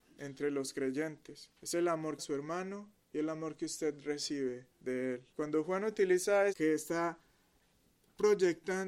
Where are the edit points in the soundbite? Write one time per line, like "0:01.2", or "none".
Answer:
0:01.5
0:02.2
0:03.0
0:04.7
0:05.3
0:06.5